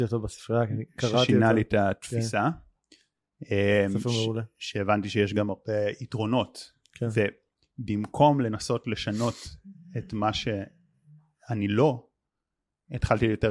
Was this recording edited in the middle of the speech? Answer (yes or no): no